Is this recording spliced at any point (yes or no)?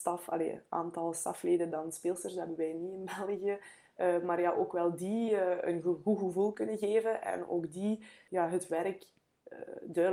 no